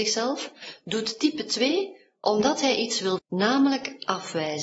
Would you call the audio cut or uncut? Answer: cut